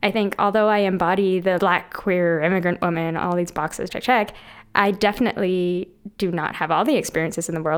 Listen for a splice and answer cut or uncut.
cut